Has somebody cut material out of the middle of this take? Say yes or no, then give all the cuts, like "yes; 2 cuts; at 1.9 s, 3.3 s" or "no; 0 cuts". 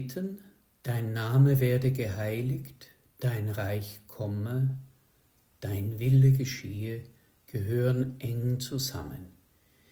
no; 0 cuts